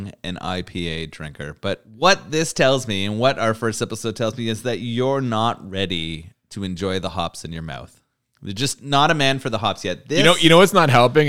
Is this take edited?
no; 0 cuts

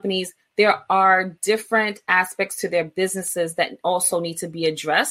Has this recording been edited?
no; 0 cuts

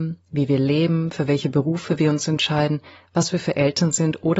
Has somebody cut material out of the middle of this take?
no; 0 cuts

